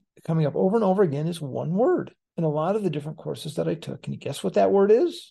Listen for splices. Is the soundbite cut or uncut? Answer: uncut